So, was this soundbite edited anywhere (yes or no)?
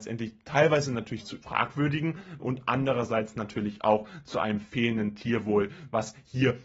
yes